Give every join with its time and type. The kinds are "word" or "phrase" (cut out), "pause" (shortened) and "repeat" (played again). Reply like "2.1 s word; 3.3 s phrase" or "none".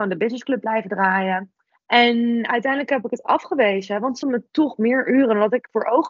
1.7 s pause; 4.2 s word